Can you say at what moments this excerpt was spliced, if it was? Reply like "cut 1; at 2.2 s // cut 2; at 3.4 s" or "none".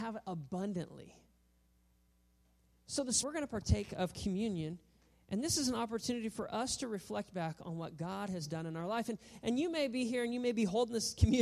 cut 1; at 3.2 s